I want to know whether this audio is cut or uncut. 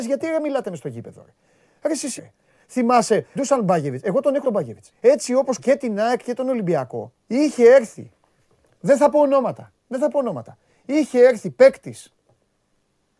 cut